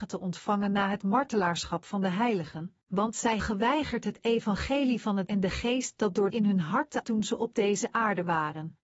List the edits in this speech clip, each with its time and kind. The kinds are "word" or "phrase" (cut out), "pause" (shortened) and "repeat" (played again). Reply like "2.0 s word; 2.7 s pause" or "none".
2.8 s pause; 3.4 s word; 5.3 s word; 6.3 s phrase; 7.0 s word